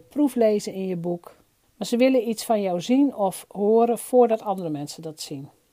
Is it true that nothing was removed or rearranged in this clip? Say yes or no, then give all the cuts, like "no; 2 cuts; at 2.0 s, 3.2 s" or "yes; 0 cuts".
no; 1 cut; at 1.6 s